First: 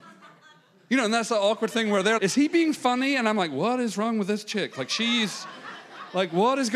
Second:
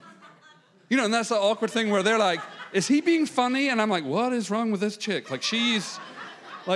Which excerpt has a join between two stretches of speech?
first; 1 cut; at 2.2 s

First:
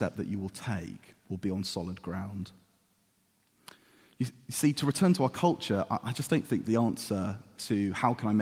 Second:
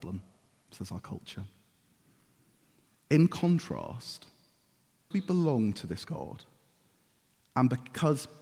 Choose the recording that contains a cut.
second; 2 cuts; at 5.1 s, 6.0 s

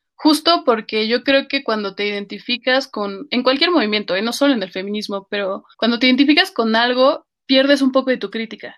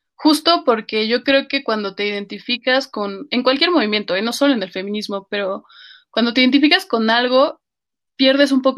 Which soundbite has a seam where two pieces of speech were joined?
first; 2 cuts; at 5.7 s, 7.4 s

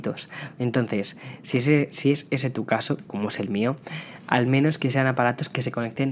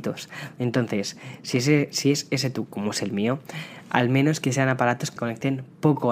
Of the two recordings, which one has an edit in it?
second; 2 cuts; at 2.7 s, 5.2 s

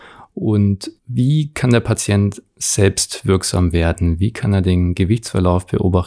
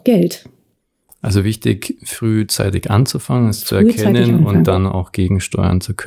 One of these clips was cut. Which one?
first; 1 cut; at 1.0 s

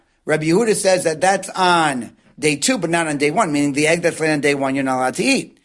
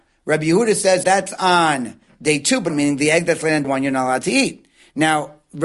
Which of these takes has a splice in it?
second; 3 cuts; at 1.0 s, 2.7 s, 3.6 s

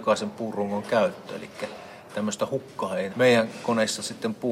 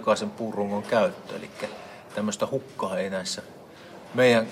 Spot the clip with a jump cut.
first; 1 cut; at 3.1 s

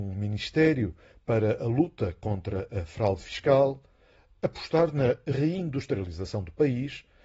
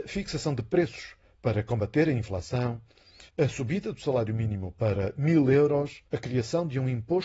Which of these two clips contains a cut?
second; 2 cuts; at 3.3 s, 6.1 s

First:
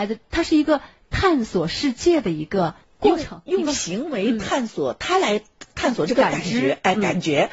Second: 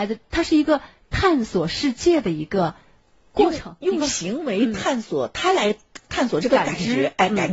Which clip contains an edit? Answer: first; 1 cut; at 2.8 s

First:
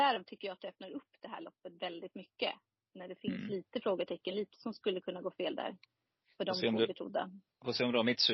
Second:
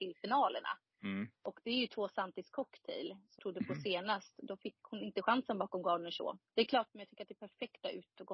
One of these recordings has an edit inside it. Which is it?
second; 3 cuts; at 3.4 s, 6.5 s, 6.9 s

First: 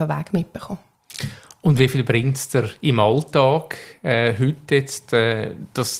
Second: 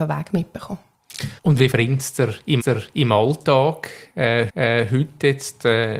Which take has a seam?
second; 4 cuts; at 1.4 s, 1.7 s, 2.6 s, 4.5 s

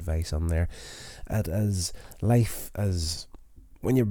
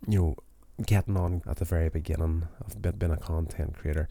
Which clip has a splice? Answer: second; 2 cuts; at 1.4 s, 2.9 s

